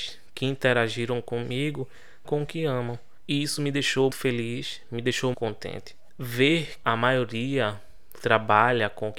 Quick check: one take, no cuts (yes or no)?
no